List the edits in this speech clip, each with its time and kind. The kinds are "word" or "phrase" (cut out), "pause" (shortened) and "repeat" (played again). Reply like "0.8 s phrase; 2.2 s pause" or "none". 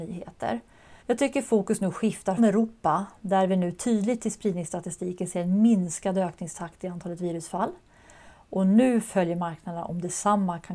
1.0 s pause; 2.4 s word